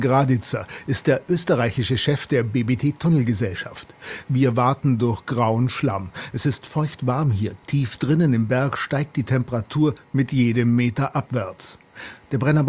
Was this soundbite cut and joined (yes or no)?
no